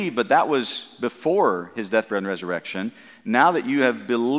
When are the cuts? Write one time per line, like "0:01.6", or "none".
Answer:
none